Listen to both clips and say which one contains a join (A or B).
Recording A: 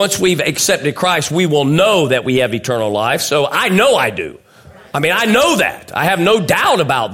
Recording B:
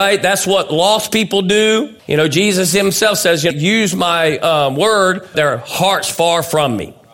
B